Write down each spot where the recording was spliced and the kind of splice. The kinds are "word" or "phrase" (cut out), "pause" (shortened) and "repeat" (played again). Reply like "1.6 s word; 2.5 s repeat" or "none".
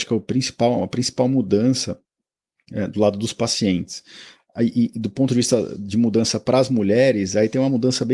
none